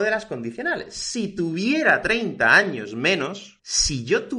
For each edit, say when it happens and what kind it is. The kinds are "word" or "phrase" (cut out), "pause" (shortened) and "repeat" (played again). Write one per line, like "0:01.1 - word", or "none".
none